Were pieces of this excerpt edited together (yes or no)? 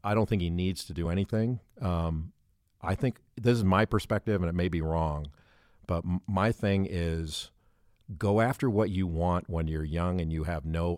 no